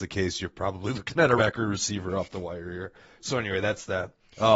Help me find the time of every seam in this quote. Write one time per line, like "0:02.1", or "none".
0:01.4